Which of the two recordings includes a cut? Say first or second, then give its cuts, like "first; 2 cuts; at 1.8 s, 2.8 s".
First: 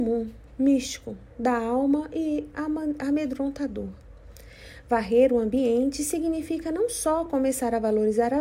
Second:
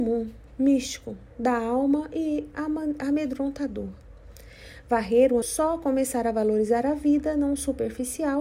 second; 1 cut; at 5.4 s